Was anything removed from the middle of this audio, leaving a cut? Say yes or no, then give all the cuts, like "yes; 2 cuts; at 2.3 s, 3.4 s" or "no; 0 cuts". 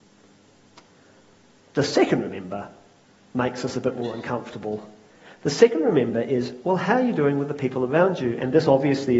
no; 0 cuts